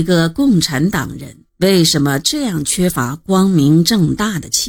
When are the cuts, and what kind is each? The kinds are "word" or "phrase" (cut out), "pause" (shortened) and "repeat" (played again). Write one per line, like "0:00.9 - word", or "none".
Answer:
0:01.5 - pause